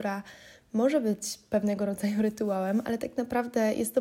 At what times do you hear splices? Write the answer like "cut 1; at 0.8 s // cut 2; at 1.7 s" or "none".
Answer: none